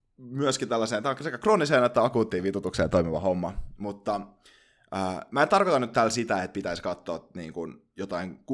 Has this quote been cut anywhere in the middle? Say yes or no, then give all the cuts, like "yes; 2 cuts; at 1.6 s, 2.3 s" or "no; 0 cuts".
no; 0 cuts